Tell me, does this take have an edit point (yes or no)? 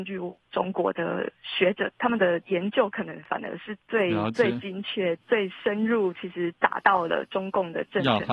yes